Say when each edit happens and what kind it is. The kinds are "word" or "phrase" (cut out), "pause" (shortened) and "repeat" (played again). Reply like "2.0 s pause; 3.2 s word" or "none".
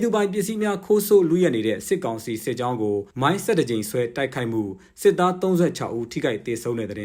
3.1 s pause